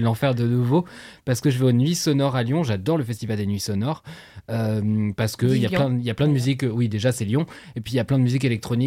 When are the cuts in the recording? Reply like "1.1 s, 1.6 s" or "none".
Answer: none

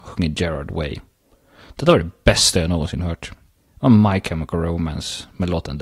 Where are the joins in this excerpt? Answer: none

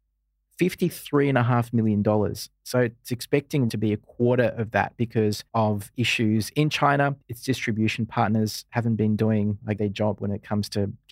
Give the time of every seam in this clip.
3.7 s, 5.5 s, 7.2 s, 9.8 s

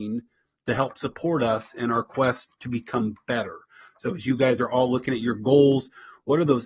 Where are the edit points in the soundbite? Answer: none

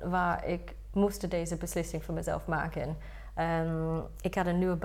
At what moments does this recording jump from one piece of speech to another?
none

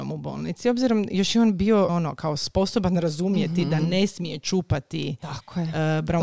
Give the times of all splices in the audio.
1.9 s

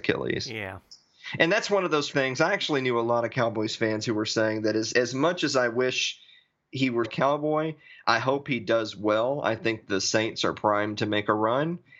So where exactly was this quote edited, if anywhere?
2.1 s, 4.9 s, 7.0 s

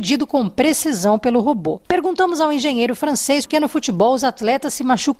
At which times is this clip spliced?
1.9 s, 3.5 s

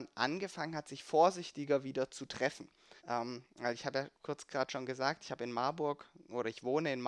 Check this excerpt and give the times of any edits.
3.0 s, 4.2 s

